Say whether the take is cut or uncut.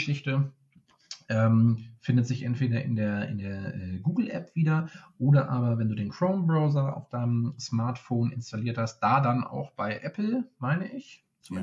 uncut